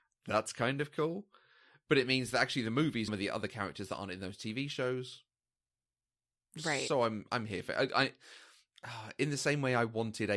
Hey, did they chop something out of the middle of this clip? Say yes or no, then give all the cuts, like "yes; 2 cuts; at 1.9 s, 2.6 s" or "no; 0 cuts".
yes; 1 cut; at 3.1 s